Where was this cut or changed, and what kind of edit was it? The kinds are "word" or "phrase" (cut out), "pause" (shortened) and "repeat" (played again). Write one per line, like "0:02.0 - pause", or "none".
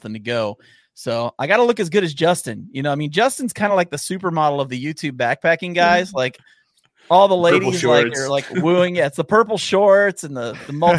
none